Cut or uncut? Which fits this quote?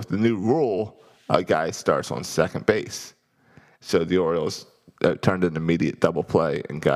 uncut